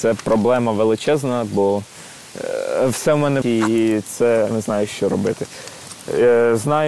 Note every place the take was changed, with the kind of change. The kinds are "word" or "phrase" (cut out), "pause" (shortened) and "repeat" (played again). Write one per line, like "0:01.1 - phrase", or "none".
0:03.4 - word
0:04.5 - word